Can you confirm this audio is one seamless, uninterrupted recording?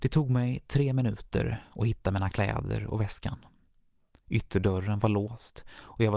yes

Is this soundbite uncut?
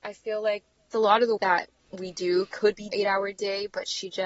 no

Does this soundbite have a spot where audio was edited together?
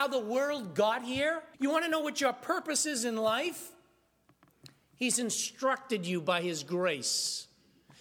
yes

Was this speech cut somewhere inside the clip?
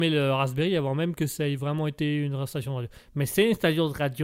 no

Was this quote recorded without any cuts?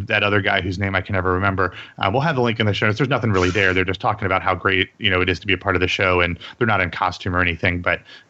yes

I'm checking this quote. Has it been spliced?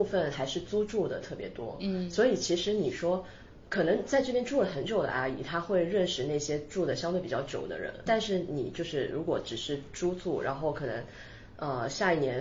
yes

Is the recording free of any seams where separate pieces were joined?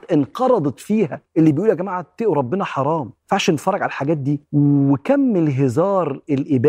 no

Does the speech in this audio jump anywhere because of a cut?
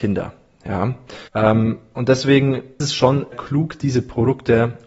yes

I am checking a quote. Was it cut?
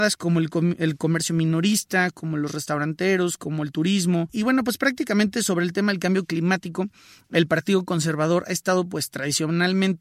no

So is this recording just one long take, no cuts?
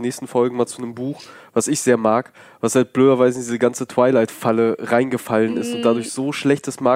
yes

